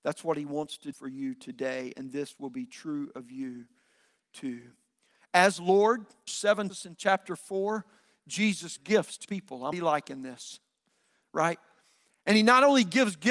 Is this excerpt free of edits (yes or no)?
no